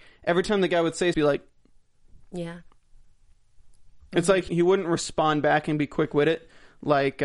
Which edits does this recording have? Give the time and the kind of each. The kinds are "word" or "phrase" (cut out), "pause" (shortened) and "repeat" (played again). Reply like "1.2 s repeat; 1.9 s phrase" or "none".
1.1 s phrase; 4.5 s word

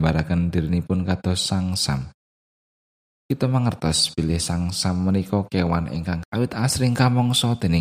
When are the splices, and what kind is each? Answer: 6.2 s phrase

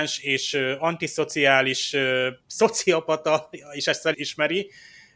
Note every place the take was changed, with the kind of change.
2.4 s pause; 4.1 s word

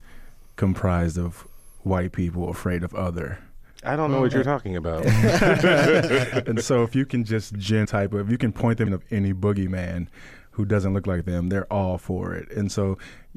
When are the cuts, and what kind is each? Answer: 3.7 s pause; 7.8 s phrase; 8.9 s phrase

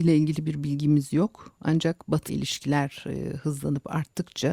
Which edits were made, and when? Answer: 2.3 s word

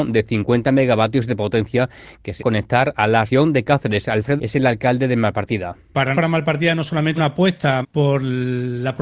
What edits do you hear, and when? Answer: 2.4 s word; 3.3 s word; 4.4 s word; 6.1 s word; 7.2 s word; 7.8 s word

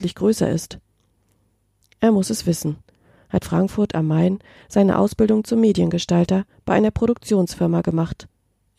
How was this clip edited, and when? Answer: 3.4 s word

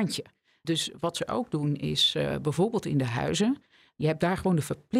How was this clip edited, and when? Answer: none

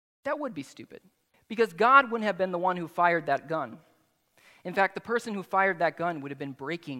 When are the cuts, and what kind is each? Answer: 1.3 s pause

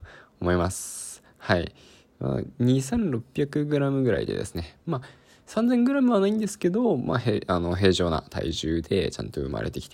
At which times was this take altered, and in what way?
none

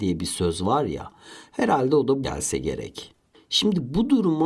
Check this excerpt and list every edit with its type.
2.2 s word

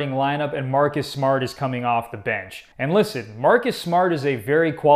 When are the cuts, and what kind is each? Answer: 2.7 s pause

